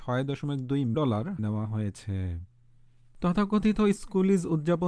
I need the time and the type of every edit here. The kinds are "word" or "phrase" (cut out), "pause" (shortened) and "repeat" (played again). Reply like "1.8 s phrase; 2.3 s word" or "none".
0.9 s word; 1.4 s word